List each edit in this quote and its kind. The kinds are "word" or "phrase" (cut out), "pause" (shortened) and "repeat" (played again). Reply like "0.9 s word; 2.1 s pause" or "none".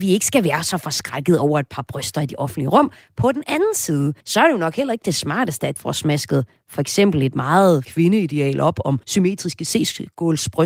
4.2 s pause; 5.8 s word; 7.8 s word; 9.0 s pause